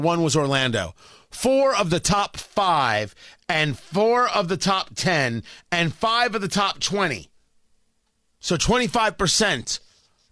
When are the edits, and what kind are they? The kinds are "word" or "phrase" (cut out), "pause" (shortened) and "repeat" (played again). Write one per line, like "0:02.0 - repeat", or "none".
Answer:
none